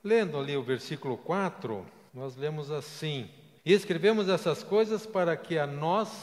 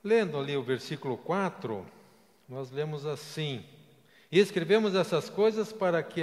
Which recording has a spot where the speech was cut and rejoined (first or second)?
first